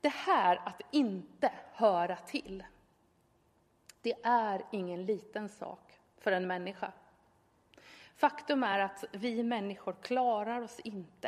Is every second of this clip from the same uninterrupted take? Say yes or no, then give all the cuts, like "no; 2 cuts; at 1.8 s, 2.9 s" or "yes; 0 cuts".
yes; 0 cuts